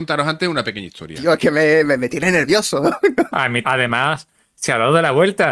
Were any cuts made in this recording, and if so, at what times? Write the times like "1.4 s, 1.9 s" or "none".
3.6 s